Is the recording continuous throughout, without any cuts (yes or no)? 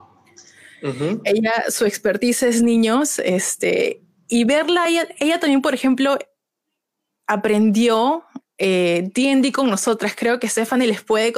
yes